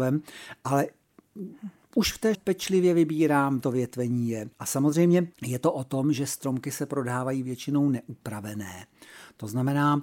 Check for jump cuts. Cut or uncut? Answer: cut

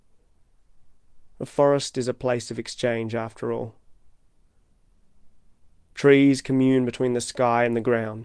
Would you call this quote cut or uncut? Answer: uncut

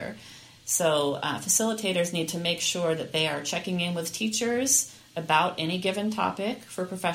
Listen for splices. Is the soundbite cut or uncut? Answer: uncut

